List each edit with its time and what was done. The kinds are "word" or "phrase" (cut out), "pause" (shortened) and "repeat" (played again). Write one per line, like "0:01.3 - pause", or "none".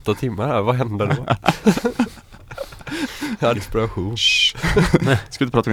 0:03.5 - word